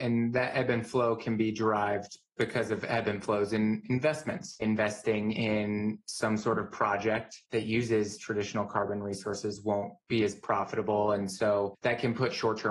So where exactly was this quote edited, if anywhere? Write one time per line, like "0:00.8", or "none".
0:04.6